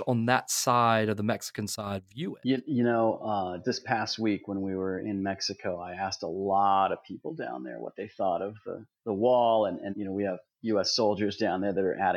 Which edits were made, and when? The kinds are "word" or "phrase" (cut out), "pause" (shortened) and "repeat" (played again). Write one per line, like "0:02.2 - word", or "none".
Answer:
0:03.6 - word
0:09.9 - word